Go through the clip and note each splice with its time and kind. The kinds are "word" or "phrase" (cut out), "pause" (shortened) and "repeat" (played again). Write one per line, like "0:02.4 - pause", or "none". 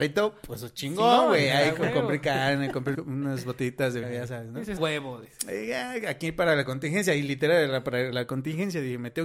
0:02.9 - word
0:04.0 - word
0:04.8 - word